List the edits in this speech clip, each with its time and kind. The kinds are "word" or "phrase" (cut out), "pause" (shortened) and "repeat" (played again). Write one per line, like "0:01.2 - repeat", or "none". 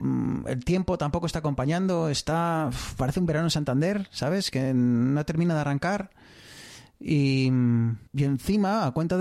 0:08.1 - pause